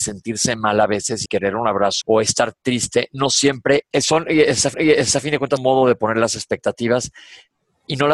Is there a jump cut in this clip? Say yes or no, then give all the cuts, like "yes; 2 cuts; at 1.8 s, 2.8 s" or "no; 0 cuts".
yes; 5 cuts; at 1.3 s, 2.0 s, 3.9 s, 4.7 s, 5.6 s